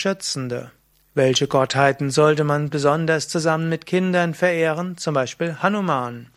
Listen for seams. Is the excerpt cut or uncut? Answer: cut